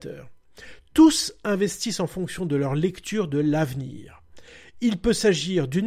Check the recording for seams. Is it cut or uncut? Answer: uncut